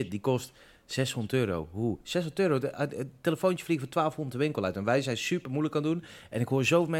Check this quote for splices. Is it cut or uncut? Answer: uncut